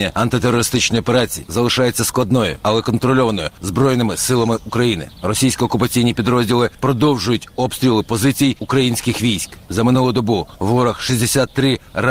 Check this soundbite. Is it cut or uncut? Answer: uncut